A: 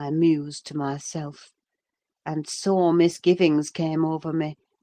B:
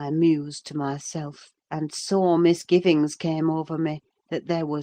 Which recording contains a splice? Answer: B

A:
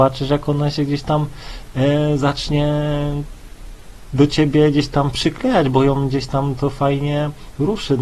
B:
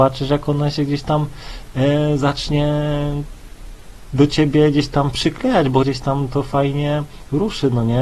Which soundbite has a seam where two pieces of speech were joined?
B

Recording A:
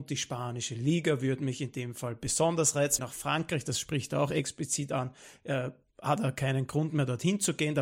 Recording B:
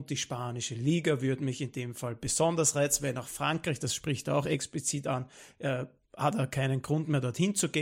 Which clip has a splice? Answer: A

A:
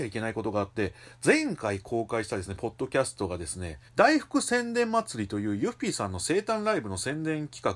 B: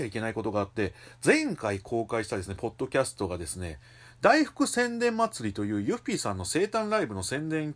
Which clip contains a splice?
A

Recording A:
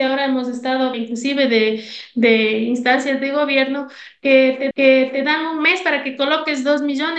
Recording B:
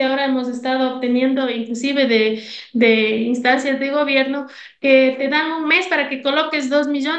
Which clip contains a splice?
A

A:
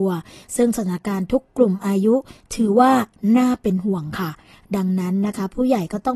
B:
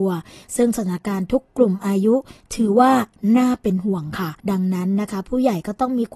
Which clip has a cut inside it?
B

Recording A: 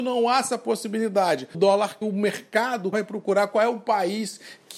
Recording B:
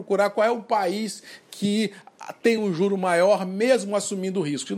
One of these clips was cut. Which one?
A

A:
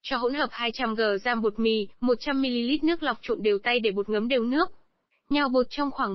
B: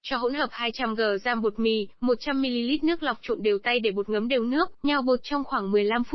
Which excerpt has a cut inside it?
B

